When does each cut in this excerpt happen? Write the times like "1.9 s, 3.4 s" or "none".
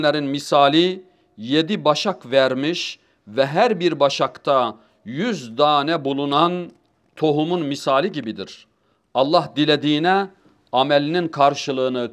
none